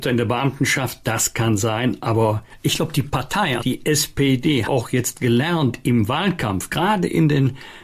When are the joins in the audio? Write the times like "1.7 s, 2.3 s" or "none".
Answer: 3.6 s, 4.6 s